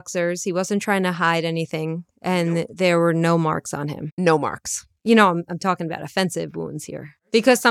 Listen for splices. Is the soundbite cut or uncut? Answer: uncut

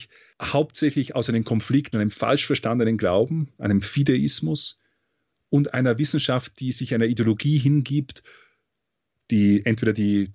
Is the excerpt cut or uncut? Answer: cut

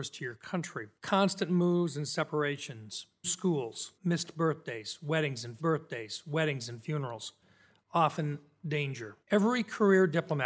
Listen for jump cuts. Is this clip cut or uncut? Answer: cut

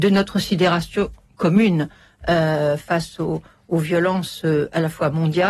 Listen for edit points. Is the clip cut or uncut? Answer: uncut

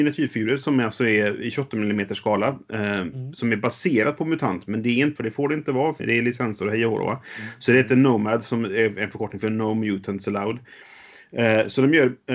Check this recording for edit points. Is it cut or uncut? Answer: cut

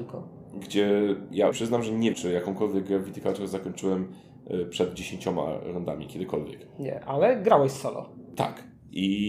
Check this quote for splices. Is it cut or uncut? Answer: cut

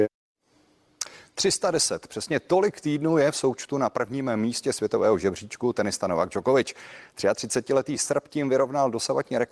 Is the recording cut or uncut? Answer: uncut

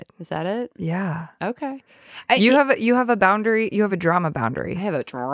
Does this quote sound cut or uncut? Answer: uncut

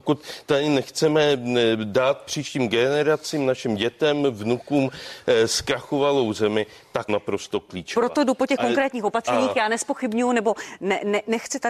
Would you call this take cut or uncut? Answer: cut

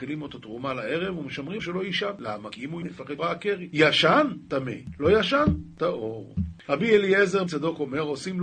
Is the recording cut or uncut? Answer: cut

